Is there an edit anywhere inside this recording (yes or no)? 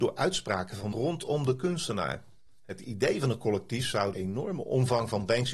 yes